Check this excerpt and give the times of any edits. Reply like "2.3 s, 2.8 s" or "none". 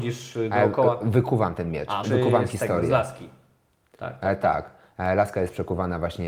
2.0 s